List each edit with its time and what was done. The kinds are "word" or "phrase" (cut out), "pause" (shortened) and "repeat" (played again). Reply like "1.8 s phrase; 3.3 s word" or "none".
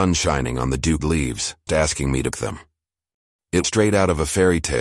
1.0 s word; 1.7 s word; 2.3 s word; 3.6 s word